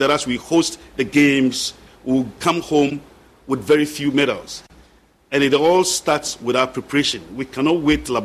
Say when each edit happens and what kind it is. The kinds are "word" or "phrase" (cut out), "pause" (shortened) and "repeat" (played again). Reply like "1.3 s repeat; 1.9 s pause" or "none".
none